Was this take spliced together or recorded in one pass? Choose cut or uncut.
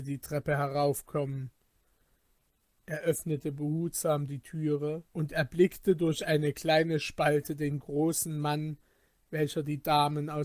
cut